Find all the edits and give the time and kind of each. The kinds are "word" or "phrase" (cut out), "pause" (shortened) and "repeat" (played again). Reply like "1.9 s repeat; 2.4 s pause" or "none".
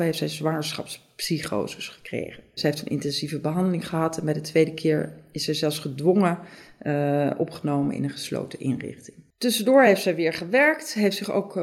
none